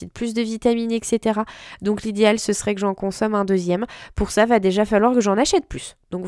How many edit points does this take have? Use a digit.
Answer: 0